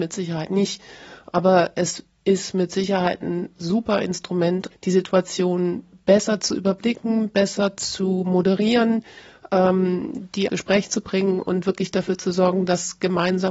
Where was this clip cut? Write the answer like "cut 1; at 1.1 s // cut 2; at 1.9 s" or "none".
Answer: cut 1; at 4.7 s // cut 2; at 10.5 s